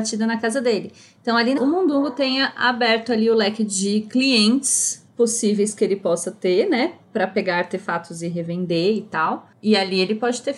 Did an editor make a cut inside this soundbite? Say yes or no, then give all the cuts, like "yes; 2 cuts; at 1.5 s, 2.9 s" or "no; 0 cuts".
yes; 1 cut; at 1.6 s